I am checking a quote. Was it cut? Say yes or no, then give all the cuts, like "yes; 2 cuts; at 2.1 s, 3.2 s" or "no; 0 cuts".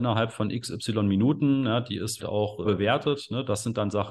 yes; 2 cuts; at 2.2 s, 2.6 s